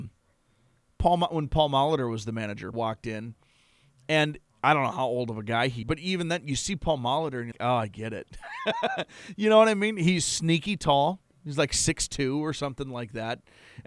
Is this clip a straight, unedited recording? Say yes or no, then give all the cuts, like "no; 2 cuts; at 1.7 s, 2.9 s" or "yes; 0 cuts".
no; 3 cuts; at 2.7 s, 5.8 s, 7.5 s